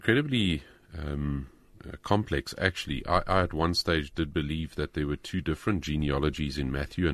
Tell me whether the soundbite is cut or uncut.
uncut